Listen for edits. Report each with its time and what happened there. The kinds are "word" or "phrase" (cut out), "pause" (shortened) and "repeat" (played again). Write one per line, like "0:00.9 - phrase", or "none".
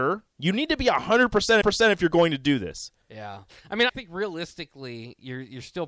0:01.6 - repeat
0:03.0 - pause
0:03.9 - phrase